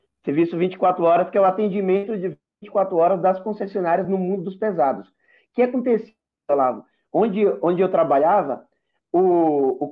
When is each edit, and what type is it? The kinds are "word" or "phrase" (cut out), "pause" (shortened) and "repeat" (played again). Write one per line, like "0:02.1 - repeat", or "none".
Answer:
none